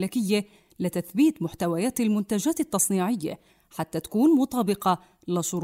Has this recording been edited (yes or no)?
no